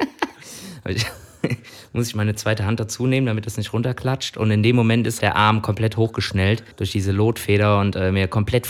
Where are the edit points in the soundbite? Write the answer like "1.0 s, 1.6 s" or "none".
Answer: 5.2 s, 6.7 s